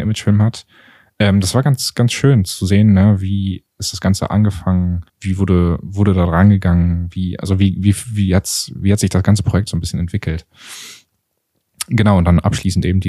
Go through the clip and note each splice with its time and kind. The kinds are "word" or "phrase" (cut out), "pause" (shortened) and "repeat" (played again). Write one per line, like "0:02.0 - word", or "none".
0:05.1 - pause